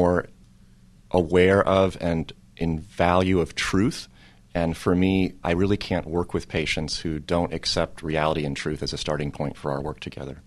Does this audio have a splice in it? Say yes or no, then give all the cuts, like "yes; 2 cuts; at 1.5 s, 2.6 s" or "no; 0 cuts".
yes; 1 cut; at 5.4 s